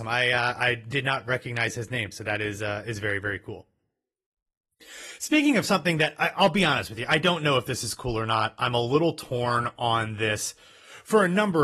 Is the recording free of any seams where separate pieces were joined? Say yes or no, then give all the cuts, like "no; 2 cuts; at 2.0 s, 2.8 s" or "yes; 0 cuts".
yes; 0 cuts